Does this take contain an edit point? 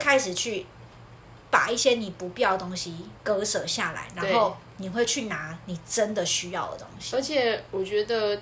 yes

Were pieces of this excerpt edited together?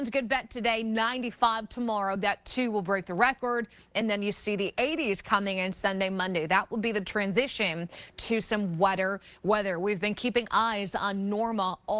no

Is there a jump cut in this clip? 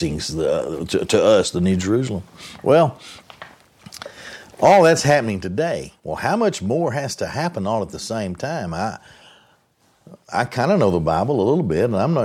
yes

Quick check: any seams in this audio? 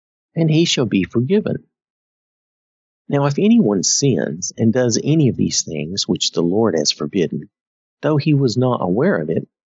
no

